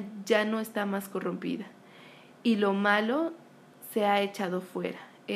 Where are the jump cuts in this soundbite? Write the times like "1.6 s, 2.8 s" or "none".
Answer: none